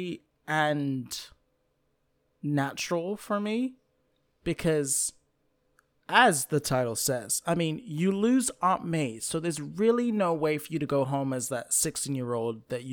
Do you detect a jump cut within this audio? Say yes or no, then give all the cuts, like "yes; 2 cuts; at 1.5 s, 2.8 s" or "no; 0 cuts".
no; 0 cuts